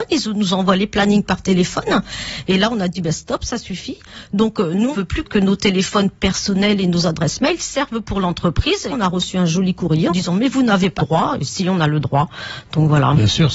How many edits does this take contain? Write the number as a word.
five